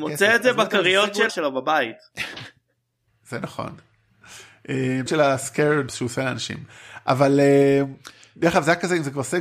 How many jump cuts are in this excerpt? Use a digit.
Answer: 3